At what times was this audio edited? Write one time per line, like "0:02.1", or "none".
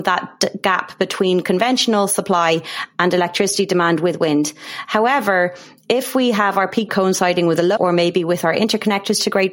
0:06.9
0:07.8